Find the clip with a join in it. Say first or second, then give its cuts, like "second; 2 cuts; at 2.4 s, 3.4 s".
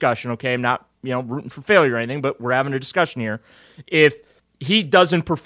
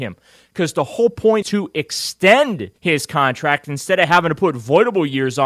second; 2 cuts; at 1.4 s, 2.8 s